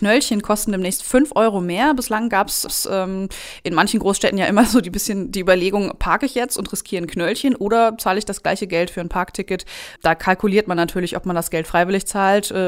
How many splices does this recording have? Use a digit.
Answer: 2